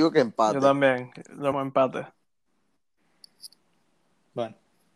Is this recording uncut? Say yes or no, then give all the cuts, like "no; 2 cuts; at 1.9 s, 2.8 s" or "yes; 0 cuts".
no; 1 cut; at 1.5 s